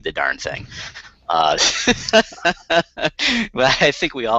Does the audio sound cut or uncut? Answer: uncut